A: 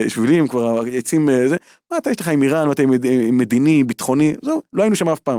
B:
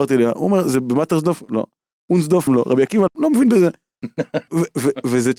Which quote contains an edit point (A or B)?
B